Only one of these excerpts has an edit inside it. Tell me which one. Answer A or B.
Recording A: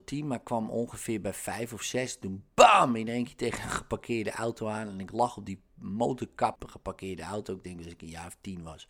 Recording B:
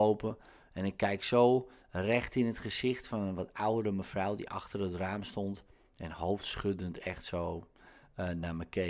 A